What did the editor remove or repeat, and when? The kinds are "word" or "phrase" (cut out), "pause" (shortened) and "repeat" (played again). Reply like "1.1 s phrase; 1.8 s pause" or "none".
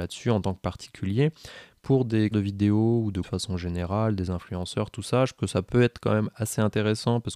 2.3 s word; 3.2 s word; 5.4 s word